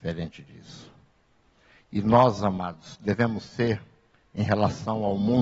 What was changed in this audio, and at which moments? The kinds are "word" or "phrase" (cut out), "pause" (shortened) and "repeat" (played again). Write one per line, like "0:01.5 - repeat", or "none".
none